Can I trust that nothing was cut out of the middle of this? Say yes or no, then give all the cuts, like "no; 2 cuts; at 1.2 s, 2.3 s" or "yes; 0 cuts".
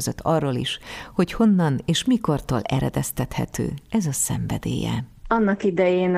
yes; 0 cuts